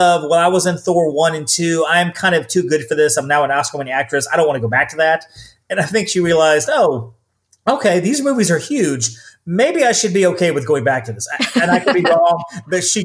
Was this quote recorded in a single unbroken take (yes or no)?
yes